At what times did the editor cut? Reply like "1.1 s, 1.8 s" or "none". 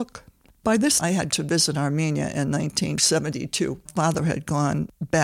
1.0 s, 1.3 s, 3.9 s